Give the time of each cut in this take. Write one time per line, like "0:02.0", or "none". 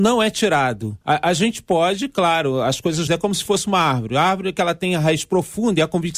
0:01.0
0:03.1